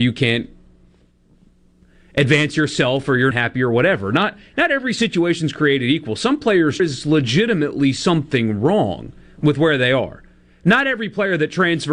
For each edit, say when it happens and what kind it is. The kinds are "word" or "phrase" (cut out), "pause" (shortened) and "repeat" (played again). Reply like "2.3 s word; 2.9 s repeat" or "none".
3.3 s word; 6.8 s phrase